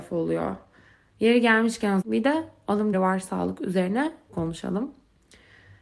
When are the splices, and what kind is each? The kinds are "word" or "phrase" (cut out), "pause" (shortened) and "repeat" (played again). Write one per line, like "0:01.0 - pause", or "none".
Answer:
0:02.0 - word
0:02.9 - phrase
0:04.3 - word